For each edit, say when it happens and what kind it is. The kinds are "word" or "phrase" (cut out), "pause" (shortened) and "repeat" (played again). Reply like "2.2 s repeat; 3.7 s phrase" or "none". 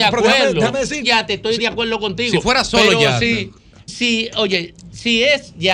1.0 s phrase; 3.9 s word